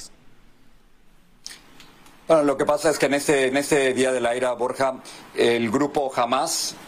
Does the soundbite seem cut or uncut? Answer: cut